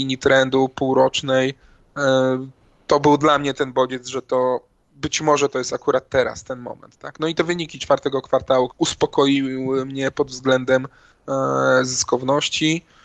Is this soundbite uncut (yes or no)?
no